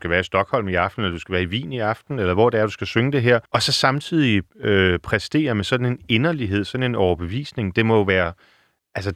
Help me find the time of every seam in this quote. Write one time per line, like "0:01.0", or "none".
0:03.5
0:04.5